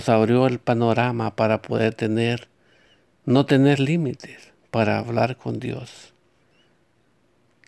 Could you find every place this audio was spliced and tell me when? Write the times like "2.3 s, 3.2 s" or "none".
none